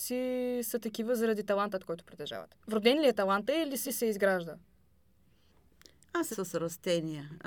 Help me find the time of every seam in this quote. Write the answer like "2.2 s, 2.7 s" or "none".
2.6 s, 3.8 s, 6.3 s